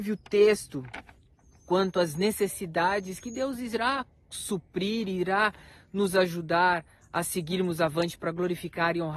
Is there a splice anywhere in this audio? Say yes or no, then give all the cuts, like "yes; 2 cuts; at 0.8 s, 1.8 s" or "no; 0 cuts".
no; 0 cuts